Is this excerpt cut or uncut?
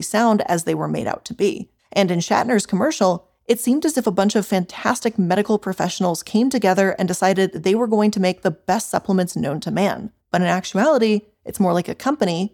cut